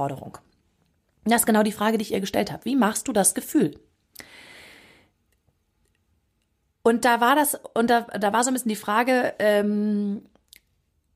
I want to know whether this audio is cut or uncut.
uncut